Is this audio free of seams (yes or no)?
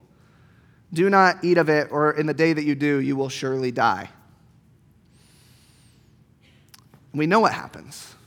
yes